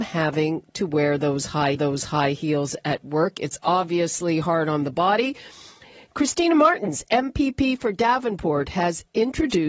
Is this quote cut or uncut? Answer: cut